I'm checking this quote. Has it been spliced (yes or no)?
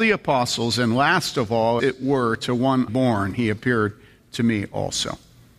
yes